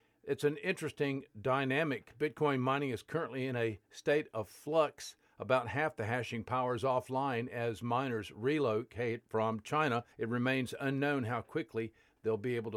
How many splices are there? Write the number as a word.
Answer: one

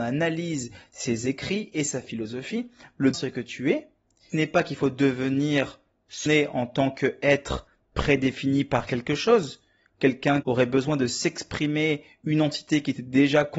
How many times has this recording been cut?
four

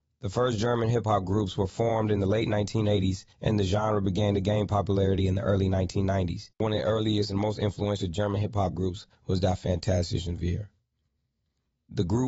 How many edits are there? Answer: three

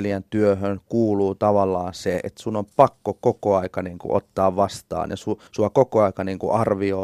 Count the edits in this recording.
one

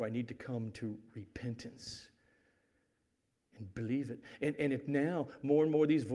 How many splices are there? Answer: zero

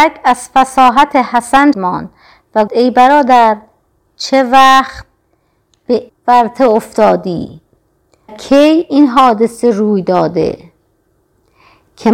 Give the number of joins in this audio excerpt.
four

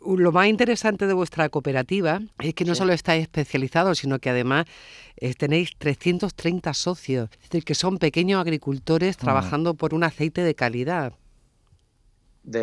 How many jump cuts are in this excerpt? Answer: two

